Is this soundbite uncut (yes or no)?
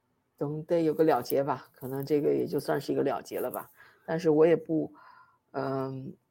yes